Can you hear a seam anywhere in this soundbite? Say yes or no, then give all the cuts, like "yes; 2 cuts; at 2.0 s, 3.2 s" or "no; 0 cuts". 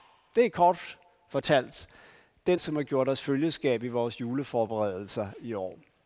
yes; 1 cut; at 2.6 s